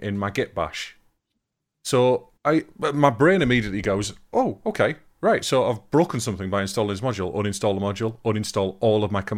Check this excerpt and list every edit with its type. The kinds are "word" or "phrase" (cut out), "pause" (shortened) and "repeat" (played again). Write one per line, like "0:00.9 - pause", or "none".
0:02.4 - pause